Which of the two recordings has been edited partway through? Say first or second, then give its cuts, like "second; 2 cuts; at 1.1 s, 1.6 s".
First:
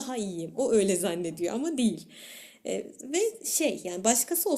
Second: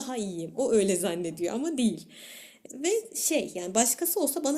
second; 1 cut; at 2.7 s